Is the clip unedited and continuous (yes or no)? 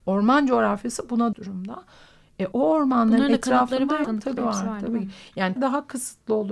no